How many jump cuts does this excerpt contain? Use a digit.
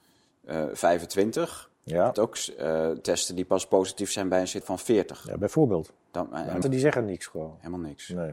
3